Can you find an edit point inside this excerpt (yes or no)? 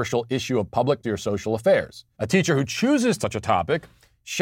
yes